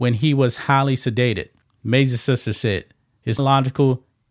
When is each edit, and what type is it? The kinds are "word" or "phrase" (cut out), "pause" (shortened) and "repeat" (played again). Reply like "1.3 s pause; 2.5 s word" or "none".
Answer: 1.6 s pause; 3.4 s word